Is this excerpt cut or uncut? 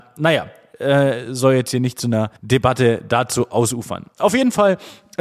cut